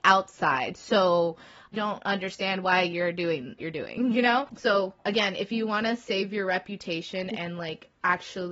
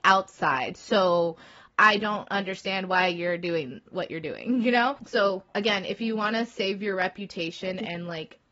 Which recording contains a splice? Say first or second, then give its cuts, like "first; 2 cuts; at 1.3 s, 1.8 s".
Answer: first; 2 cuts; at 1.7 s, 3.6 s